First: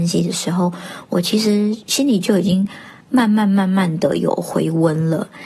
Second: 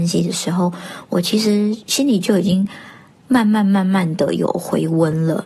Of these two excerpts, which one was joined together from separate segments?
first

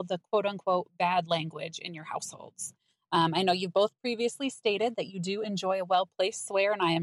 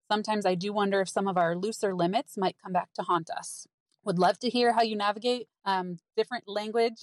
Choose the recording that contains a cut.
second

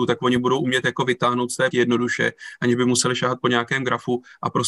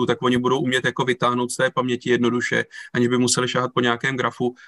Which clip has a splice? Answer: first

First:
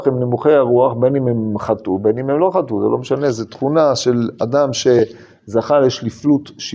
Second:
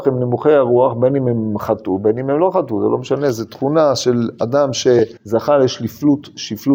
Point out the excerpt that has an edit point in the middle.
second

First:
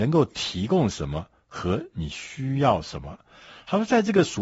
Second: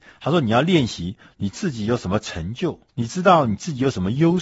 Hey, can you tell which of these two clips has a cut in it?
second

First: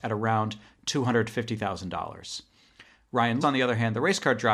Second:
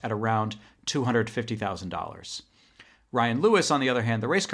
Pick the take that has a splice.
first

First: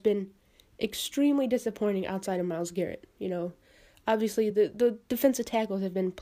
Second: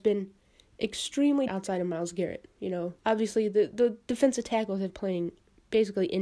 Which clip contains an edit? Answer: second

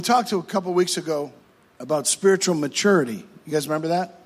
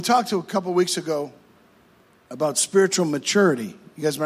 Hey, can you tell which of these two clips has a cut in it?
first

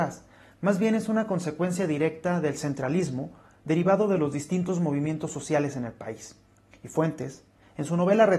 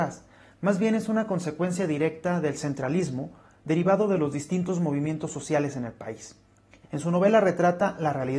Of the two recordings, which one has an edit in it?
second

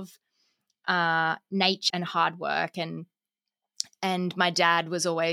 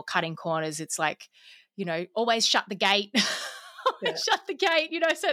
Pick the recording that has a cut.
first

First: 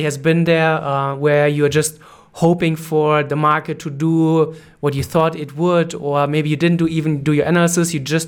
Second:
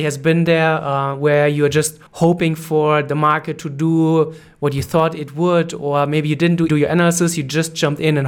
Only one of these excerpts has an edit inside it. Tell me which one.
second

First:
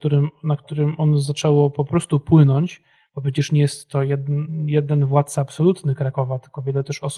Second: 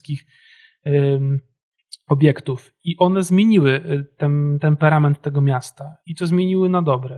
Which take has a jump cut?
second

